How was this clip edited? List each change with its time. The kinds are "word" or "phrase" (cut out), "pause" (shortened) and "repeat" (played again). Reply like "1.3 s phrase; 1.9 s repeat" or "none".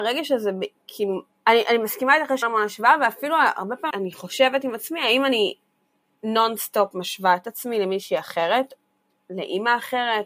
1.3 s pause; 2.4 s word; 3.9 s word